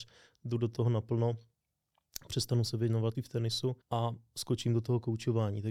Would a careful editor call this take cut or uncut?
cut